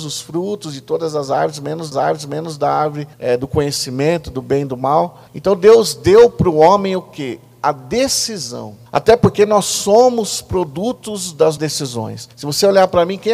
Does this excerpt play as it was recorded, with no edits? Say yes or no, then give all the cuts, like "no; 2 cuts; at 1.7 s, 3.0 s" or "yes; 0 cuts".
no; 6 cuts; at 1.9 s, 3.1 s, 5.3 s, 8.9 s, 11.6 s, 12.3 s